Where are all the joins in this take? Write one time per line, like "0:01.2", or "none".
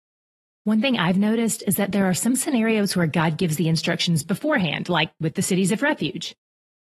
none